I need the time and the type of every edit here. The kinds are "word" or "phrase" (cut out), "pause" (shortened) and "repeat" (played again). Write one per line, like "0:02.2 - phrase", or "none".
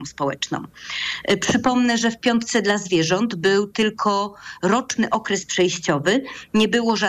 none